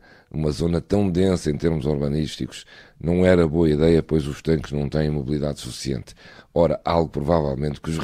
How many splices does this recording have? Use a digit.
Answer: 0